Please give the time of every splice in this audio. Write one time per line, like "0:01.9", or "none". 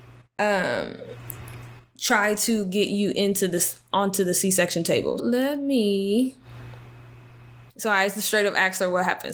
0:05.2
0:07.7